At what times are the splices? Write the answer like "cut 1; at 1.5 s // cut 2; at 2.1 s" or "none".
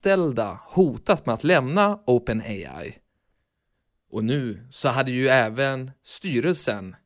none